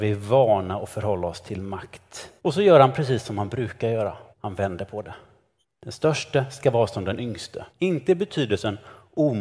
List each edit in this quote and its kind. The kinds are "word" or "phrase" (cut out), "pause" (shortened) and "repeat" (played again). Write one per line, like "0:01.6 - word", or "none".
0:02.4 - pause
0:04.3 - pause
0:05.6 - pause
0:07.7 - pause